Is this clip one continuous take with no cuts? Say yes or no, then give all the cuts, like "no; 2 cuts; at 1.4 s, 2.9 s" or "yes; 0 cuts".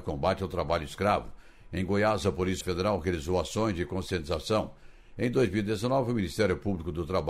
no; 1 cut; at 2.6 s